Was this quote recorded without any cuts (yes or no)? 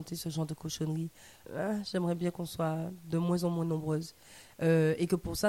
yes